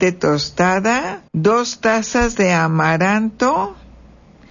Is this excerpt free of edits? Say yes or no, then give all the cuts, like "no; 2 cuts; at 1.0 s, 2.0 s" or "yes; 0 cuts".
no; 1 cut; at 1.3 s